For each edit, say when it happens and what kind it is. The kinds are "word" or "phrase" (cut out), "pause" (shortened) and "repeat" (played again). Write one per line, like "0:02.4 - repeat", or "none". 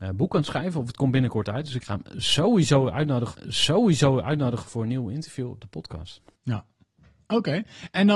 0:03.3 - repeat